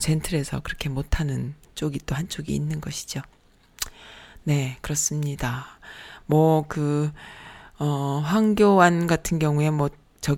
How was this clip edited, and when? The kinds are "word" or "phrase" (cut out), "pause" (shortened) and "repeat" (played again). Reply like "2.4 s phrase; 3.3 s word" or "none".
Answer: none